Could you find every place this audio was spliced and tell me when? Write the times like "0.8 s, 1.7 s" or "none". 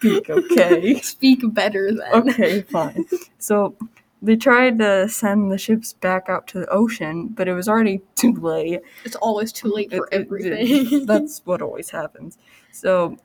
none